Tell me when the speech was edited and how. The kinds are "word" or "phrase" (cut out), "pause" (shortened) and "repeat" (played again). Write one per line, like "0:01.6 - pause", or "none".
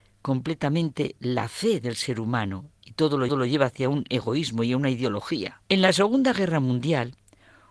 0:03.3 - repeat
0:05.6 - pause